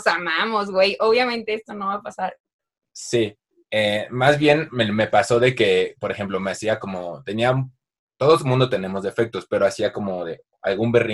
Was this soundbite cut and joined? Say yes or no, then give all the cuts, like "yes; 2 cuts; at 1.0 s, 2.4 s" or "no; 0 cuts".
no; 0 cuts